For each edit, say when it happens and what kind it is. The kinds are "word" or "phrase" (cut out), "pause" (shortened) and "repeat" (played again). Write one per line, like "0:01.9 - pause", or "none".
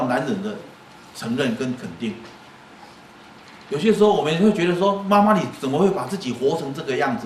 none